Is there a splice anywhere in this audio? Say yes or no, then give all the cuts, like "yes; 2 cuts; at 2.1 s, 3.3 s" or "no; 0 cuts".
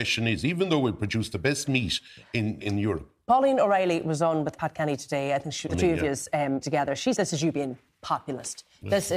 yes; 5 cuts; at 2.6 s, 4.5 s, 5.7 s, 6.6 s, 7.2 s